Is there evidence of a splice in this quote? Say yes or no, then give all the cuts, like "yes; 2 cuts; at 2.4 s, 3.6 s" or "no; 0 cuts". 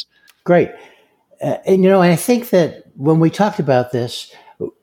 no; 0 cuts